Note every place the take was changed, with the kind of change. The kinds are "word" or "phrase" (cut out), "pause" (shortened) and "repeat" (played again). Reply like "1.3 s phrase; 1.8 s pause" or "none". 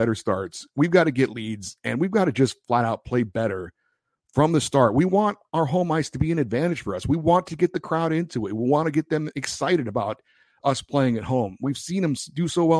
none